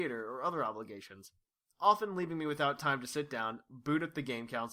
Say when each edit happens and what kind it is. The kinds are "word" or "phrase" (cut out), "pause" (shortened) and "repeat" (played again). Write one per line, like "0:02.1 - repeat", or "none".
none